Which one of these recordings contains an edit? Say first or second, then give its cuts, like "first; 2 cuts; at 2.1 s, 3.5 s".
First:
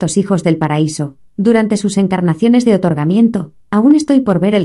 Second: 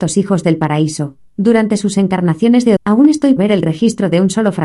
second; 2 cuts; at 2.8 s, 3.4 s